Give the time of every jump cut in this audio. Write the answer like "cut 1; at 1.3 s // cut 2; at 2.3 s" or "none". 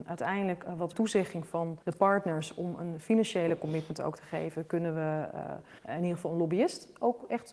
cut 1; at 0.9 s // cut 2; at 1.8 s // cut 3; at 5.8 s